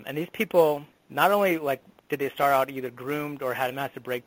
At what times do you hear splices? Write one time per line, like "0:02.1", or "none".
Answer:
0:00.9